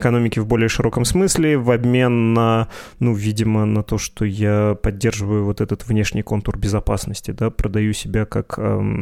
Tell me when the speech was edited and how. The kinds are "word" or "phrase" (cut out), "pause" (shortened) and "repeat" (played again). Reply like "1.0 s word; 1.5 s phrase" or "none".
none